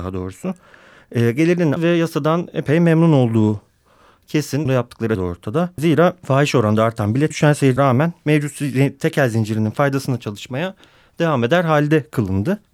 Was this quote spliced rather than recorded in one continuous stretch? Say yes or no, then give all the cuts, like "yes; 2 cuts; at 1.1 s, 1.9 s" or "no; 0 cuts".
yes; 5 cuts; at 1.8 s, 4.7 s, 5.2 s, 7.3 s, 7.8 s